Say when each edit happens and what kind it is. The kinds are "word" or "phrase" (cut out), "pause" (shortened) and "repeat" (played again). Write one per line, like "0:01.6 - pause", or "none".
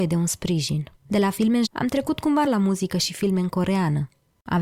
0:01.0 - pause
0:01.7 - word
0:02.5 - word